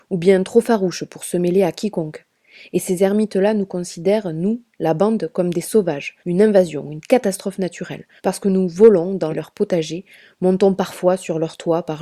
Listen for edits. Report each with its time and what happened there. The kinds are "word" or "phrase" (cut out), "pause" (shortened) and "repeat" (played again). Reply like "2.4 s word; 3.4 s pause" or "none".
6.2 s pause; 8.2 s pause; 9.3 s phrase